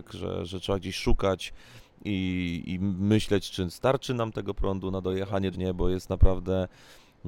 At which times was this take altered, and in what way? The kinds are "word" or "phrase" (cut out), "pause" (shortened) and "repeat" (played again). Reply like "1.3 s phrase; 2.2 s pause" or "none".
5.5 s phrase